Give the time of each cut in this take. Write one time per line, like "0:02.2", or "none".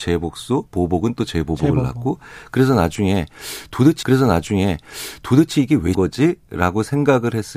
0:04.0
0:05.9